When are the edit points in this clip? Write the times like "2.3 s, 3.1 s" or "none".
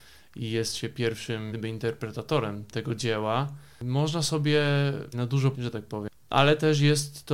1.5 s, 2.7 s, 5.1 s, 5.5 s